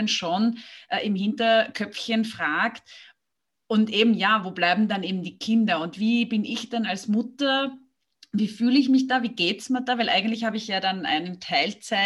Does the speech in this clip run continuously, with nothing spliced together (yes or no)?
yes